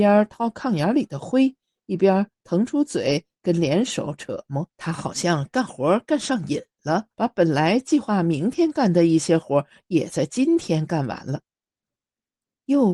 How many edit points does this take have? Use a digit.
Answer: 2